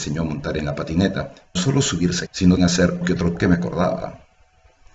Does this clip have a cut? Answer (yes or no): yes